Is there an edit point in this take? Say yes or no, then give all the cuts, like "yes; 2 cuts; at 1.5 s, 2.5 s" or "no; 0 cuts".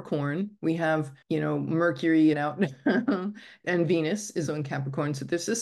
yes; 4 cuts; at 1.2 s, 2.3 s, 3.6 s, 4.5 s